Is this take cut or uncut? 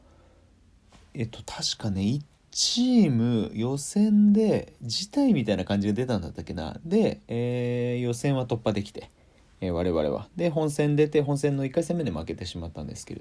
uncut